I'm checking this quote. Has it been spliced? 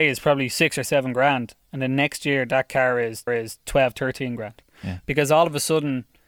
yes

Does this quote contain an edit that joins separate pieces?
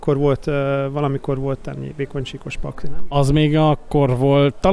no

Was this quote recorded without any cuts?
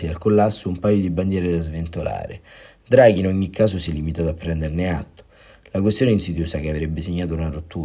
yes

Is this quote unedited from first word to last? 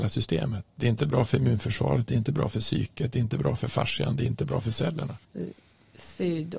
no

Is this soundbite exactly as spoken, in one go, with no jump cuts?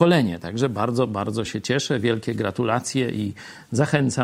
yes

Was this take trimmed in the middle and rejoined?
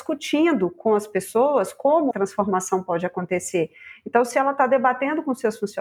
yes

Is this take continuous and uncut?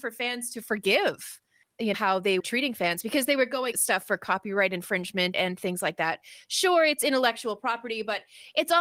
no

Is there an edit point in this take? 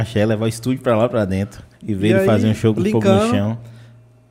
yes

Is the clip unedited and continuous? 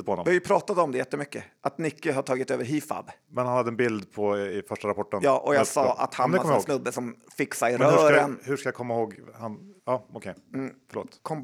no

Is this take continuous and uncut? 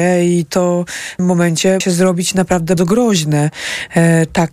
no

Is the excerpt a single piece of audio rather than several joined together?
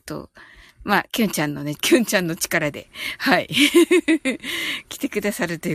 no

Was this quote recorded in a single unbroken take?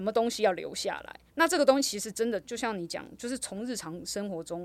no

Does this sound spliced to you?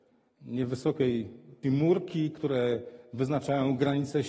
yes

